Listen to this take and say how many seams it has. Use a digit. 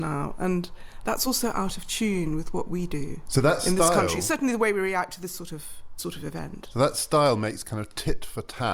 0